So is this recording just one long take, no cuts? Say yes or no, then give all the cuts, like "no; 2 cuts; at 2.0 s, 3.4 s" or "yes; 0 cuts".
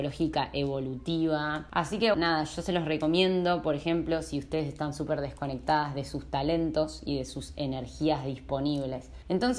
no; 1 cut; at 2.1 s